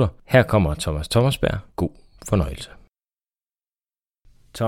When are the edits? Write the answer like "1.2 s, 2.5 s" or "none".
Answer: 1.7 s